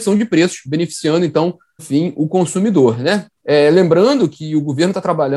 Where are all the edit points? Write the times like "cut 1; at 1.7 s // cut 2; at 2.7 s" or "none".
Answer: cut 1; at 1.8 s // cut 2; at 3.3 s // cut 3; at 4.3 s